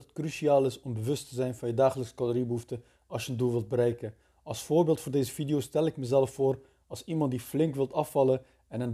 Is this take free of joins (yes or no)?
yes